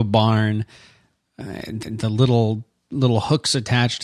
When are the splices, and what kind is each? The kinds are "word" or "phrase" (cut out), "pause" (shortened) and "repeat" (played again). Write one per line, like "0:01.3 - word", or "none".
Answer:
0:01.8 - repeat